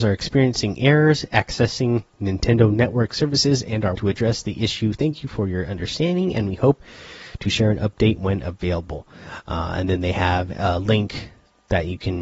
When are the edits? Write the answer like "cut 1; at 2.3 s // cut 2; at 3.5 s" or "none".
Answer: cut 1; at 3.9 s